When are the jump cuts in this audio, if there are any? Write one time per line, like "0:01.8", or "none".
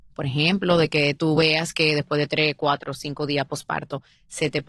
none